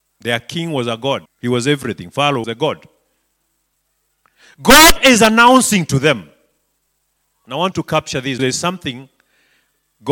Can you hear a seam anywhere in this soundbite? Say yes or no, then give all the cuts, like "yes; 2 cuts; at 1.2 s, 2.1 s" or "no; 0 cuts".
yes; 4 cuts; at 1.3 s, 2.4 s, 7.7 s, 8.4 s